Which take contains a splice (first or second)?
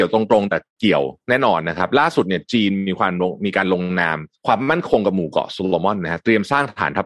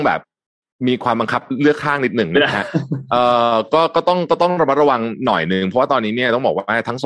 first